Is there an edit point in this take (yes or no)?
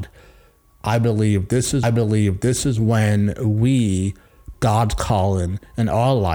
yes